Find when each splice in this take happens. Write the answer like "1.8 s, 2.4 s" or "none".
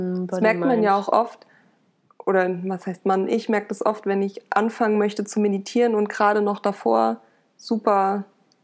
none